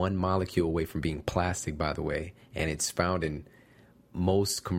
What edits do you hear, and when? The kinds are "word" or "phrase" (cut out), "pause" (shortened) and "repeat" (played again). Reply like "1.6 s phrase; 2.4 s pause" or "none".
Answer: none